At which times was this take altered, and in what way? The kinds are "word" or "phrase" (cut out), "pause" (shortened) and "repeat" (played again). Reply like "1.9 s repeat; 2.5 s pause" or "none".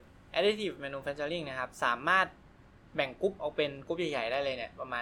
none

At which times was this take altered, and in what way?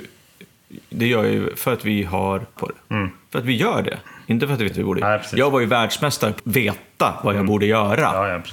2.6 s word; 4.7 s word; 5.0 s word; 6.4 s word

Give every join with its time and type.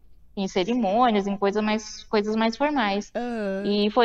none

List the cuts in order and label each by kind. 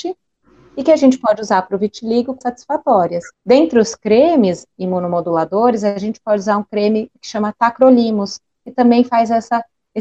2.4 s word; 3.3 s pause

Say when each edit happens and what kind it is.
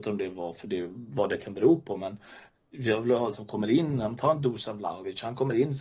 3.3 s word

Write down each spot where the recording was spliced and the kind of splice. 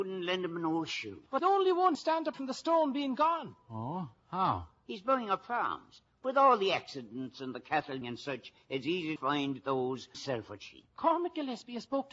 1.4 s word; 1.9 s word; 2.3 s word; 8.0 s word; 9.2 s word; 10.1 s word

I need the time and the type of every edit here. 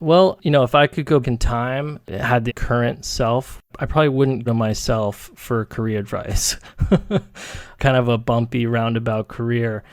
1.2 s word; 2.0 s word; 2.5 s phrase; 3.7 s pause; 4.5 s word; 7.8 s phrase

